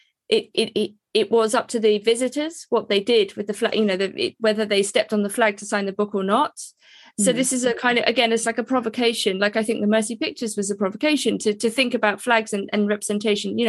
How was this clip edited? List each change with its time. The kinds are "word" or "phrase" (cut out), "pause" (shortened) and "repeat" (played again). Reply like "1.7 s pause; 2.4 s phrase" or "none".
none